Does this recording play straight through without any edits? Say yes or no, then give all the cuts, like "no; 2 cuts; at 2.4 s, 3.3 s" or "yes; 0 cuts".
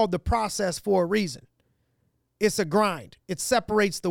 yes; 0 cuts